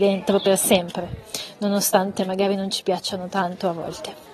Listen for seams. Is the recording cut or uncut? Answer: uncut